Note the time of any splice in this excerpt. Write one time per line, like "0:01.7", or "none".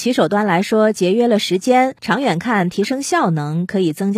0:02.0